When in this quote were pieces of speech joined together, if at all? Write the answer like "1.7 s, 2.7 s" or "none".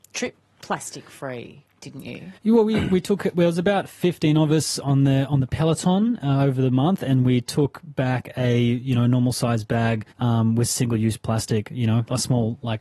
2.4 s, 10.1 s